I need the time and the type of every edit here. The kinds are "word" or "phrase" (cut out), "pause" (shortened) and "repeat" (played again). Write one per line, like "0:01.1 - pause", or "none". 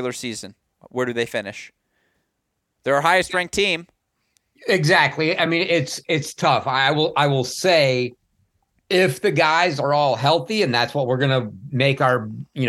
none